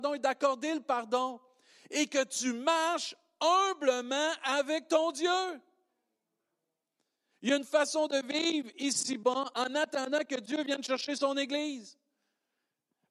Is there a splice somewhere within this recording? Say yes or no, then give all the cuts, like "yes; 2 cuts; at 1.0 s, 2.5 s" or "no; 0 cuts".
no; 0 cuts